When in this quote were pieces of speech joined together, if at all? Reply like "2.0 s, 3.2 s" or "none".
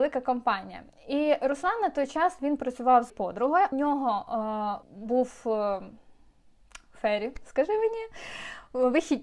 3.1 s, 3.7 s, 4.8 s

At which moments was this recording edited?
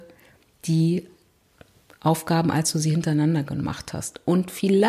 none

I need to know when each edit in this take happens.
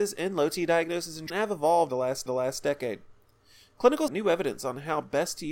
1.3 s, 1.9 s, 2.3 s, 4.1 s

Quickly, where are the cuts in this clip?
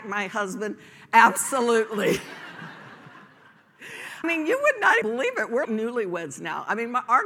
4.2 s, 5.0 s, 5.6 s

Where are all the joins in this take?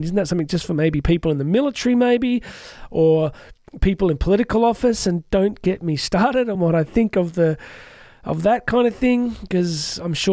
none

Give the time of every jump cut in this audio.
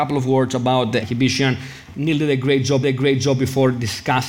1.0 s, 2.8 s

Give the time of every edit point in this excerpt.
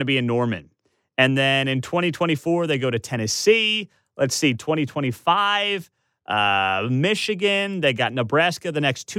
none

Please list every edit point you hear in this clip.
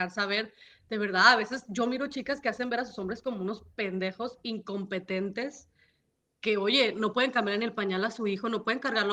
none

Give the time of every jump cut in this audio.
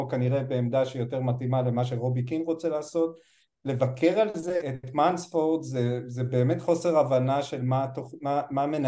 4.6 s

